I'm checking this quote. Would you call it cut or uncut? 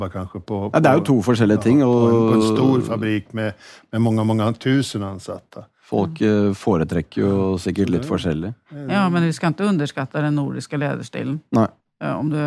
uncut